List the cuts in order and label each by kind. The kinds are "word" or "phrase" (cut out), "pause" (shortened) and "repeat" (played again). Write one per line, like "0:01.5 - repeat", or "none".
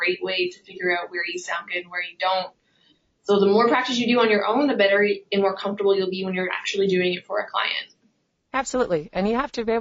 none